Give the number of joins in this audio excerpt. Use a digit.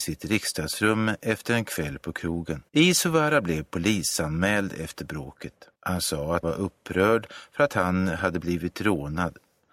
3